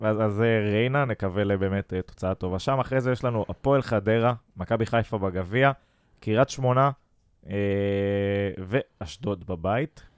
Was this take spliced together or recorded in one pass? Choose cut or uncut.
uncut